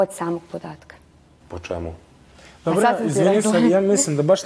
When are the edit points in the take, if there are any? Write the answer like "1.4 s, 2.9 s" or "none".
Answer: none